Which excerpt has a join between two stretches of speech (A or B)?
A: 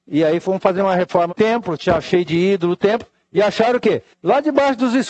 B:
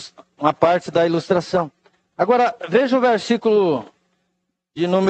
A